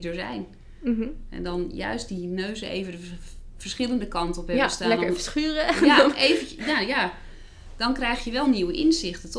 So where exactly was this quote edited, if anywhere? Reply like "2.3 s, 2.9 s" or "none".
none